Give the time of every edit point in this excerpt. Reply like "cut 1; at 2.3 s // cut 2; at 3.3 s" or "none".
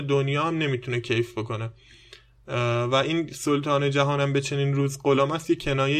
none